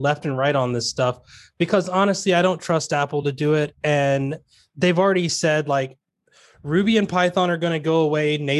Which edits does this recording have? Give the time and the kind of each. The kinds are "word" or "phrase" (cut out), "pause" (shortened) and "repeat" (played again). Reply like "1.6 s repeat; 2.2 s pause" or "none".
none